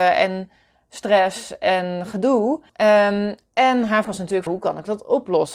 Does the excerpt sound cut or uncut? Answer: cut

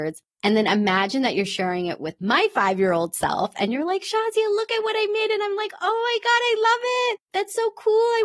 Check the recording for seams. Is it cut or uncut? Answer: uncut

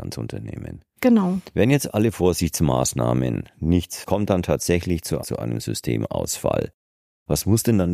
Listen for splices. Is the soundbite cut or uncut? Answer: cut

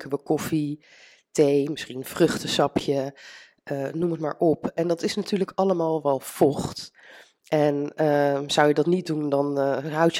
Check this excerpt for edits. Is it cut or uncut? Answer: uncut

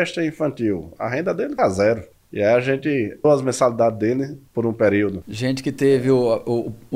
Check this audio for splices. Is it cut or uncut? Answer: cut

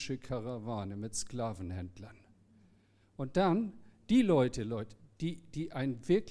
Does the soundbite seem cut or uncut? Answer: uncut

